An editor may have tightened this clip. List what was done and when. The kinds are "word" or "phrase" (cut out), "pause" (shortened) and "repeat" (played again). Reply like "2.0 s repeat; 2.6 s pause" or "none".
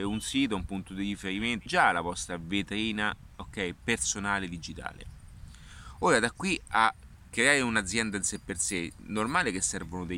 1.7 s phrase